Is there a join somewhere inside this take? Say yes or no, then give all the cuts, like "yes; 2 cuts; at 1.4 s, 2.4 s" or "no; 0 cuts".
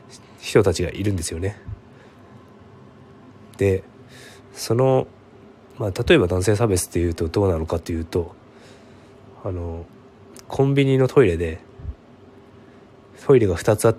no; 0 cuts